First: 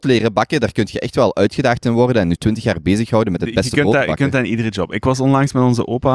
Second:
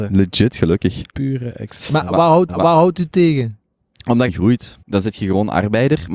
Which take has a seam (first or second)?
second